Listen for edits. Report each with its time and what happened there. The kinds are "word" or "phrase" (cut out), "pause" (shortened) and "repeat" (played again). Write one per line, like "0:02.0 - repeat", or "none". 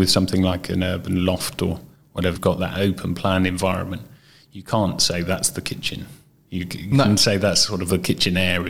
0:02.4 - word